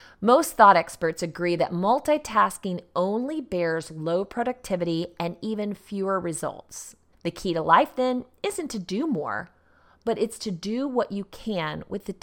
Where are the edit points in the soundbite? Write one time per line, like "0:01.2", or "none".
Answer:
0:07.1

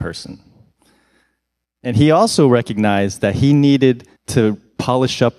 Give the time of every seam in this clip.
0:04.2

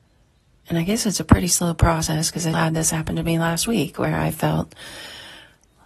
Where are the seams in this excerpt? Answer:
0:02.5

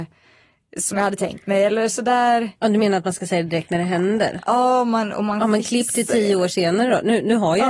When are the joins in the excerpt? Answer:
none

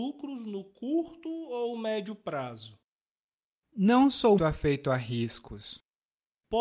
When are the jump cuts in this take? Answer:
0:04.4

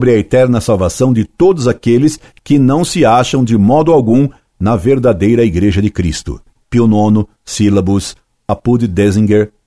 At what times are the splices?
none

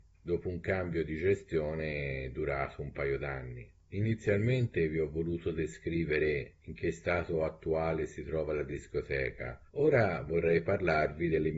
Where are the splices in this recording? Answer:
0:09.7

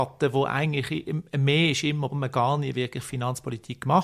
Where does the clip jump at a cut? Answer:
0:02.1

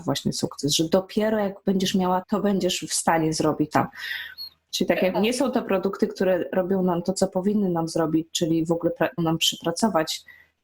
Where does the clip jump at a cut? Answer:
0:02.2
0:03.7
0:05.1
0:09.2

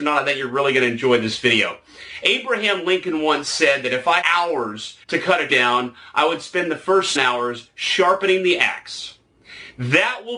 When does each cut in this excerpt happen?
0:04.2
0:05.0
0:05.5
0:07.2

